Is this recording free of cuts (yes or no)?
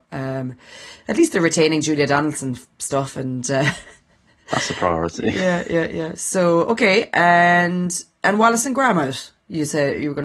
yes